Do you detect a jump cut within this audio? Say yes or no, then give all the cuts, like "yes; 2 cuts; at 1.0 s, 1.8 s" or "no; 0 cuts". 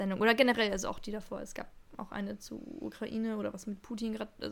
no; 0 cuts